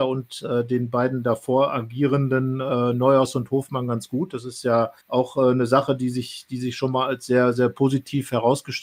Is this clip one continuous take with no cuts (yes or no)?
no